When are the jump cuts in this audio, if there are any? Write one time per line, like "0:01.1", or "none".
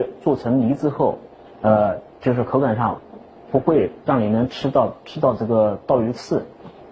none